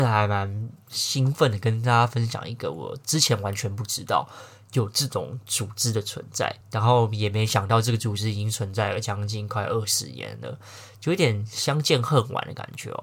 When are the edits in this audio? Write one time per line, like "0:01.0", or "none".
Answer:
0:06.6

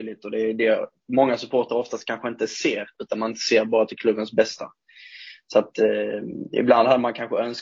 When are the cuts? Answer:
none

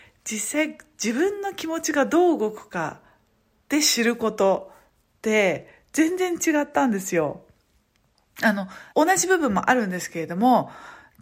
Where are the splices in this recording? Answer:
0:08.9

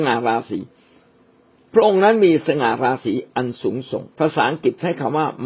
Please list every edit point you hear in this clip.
0:04.1

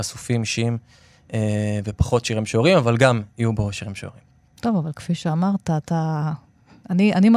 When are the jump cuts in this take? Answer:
none

